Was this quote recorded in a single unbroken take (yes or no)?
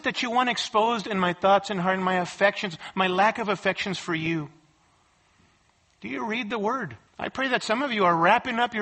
no